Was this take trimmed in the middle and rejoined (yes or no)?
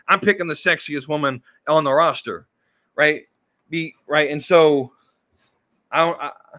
no